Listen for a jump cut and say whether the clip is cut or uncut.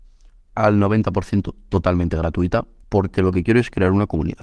cut